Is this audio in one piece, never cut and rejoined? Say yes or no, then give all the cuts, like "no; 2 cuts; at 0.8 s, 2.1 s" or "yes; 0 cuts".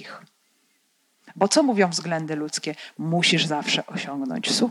yes; 0 cuts